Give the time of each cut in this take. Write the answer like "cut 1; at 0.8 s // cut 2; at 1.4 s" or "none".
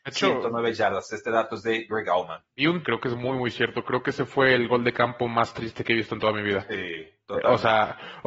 cut 1; at 2.5 s // cut 2; at 2.8 s